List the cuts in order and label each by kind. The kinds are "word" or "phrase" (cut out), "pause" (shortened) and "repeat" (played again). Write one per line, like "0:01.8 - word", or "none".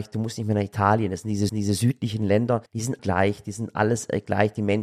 0:01.5 - repeat
0:02.7 - pause
0:03.0 - word